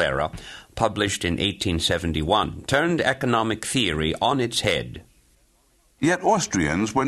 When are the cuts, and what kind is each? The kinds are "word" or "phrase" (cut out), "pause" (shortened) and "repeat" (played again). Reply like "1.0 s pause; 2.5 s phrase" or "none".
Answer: none